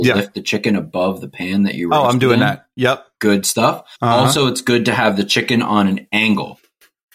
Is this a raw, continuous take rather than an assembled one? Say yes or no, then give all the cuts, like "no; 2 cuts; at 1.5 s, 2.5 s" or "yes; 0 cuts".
no; 1 cut; at 4.0 s